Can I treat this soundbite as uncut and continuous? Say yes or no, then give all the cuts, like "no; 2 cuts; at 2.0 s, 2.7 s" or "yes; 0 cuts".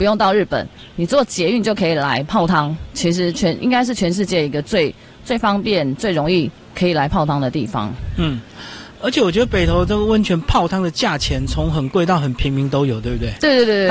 yes; 0 cuts